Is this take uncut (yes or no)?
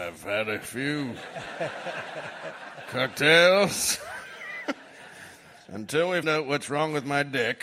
no